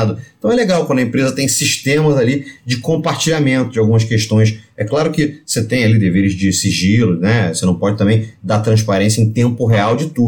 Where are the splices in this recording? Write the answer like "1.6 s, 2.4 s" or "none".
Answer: none